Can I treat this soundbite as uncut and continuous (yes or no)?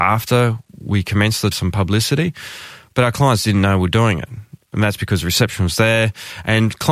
no